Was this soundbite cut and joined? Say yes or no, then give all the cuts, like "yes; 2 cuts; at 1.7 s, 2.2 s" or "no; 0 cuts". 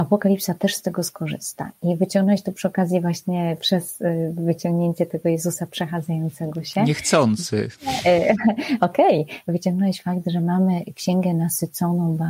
no; 0 cuts